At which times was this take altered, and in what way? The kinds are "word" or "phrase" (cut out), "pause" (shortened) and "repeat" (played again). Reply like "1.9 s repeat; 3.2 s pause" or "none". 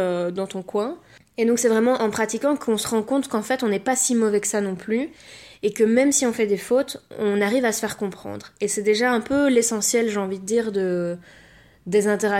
none